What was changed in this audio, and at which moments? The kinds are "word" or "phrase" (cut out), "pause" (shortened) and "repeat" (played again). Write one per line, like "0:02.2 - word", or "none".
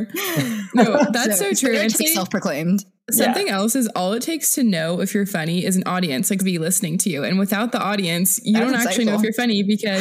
0:01.9 - word
0:03.0 - pause
0:06.4 - phrase